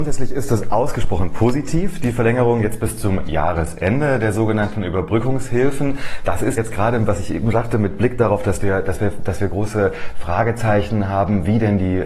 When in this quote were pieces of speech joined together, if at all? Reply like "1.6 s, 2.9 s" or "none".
6.6 s